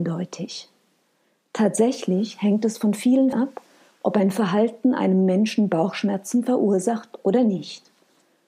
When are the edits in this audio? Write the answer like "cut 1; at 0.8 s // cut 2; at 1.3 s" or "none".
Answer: cut 1; at 3.3 s